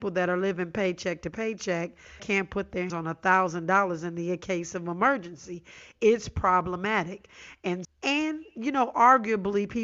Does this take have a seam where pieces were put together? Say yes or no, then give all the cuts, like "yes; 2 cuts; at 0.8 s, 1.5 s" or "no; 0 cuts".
yes; 3 cuts; at 2.2 s, 2.9 s, 7.8 s